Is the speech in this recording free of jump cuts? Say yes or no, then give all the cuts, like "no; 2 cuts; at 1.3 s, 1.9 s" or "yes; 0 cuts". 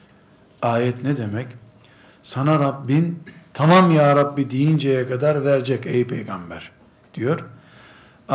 yes; 0 cuts